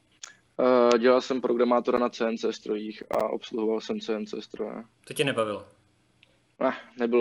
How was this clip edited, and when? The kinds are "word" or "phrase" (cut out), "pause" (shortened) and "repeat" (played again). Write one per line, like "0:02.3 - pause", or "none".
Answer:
0:04.9 - pause